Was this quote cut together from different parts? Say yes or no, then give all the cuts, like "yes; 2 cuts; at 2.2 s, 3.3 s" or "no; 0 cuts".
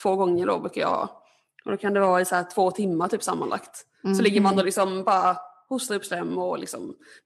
no; 0 cuts